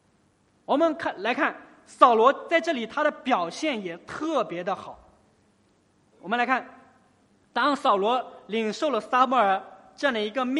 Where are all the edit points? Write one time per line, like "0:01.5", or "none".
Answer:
none